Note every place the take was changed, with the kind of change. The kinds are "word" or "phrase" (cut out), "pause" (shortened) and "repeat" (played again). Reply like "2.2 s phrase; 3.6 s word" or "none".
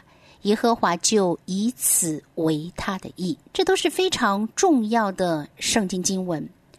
1.4 s pause; 3.5 s pause